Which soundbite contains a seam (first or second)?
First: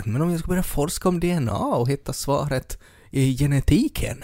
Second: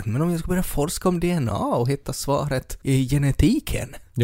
second